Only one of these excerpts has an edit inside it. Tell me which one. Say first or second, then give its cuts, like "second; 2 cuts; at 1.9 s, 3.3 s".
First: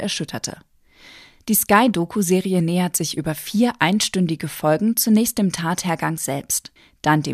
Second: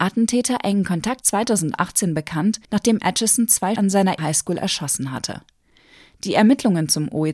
second; 4 cuts; at 1.2 s, 2.6 s, 3.8 s, 4.2 s